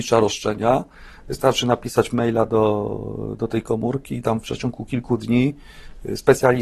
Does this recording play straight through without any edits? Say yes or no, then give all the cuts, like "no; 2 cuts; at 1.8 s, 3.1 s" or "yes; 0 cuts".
yes; 0 cuts